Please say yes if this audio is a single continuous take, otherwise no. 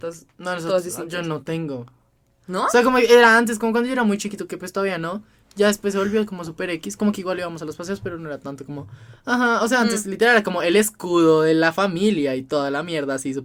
yes